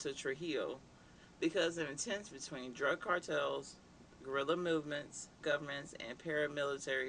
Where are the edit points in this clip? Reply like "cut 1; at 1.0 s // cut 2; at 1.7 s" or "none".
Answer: cut 1; at 2.3 s // cut 2; at 5.4 s